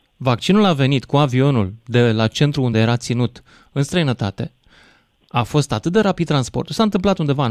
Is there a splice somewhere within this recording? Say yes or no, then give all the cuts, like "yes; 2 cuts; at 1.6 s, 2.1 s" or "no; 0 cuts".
no; 0 cuts